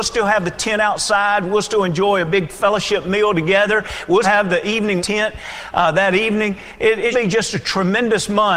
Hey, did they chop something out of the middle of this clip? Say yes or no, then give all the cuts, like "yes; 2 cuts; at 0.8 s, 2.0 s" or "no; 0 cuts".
yes; 3 cuts; at 4.2 s, 5.0 s, 7.1 s